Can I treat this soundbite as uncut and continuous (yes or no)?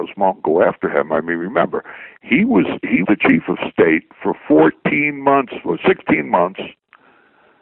no